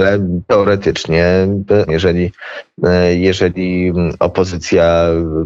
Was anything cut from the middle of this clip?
yes; 1 cut; at 1.9 s

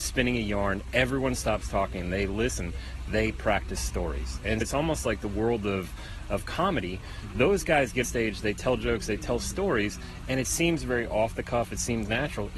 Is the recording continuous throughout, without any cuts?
no; 2 cuts; at 4.6 s, 8.0 s

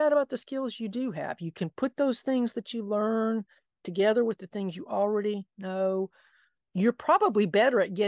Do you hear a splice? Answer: no; 0 cuts

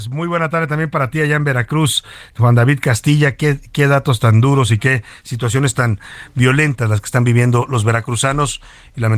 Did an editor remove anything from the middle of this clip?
no; 0 cuts

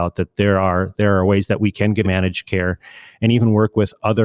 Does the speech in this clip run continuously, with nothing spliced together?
no; 2 cuts; at 0.9 s, 2.0 s

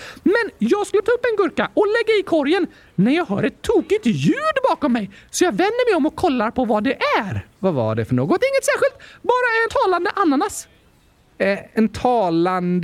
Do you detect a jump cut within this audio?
yes; 3 cuts; at 1.0 s, 9.7 s, 11.7 s

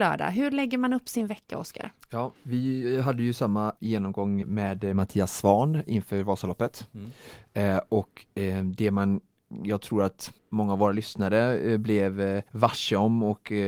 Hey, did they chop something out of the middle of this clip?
yes; 5 cuts; at 2.4 s, 3.8 s, 4.4 s, 10.4 s, 12.5 s

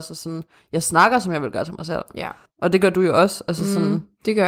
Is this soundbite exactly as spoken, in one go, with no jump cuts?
yes; 0 cuts

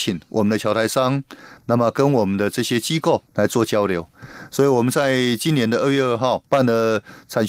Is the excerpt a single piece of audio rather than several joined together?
no; 2 cuts; at 3.3 s, 6.5 s

